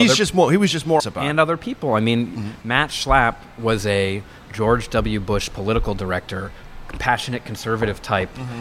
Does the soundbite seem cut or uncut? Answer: cut